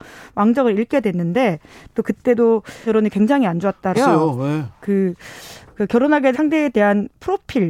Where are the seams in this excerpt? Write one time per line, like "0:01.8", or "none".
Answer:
0:02.9
0:03.9
0:06.3